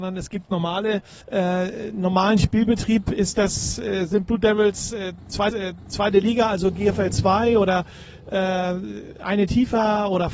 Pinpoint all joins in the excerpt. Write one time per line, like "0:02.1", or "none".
0:01.2
0:05.5